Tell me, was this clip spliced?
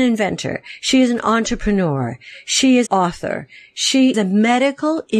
yes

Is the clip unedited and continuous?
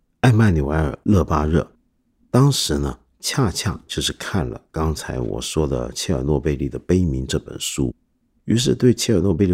yes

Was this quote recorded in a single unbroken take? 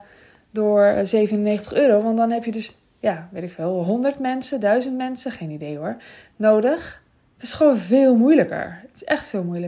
yes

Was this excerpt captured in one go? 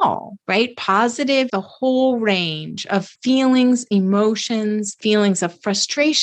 no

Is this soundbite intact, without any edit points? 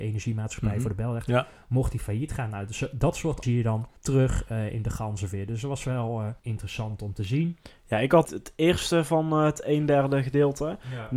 no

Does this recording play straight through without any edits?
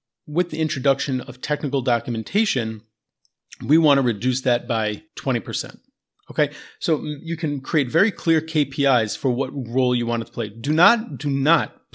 no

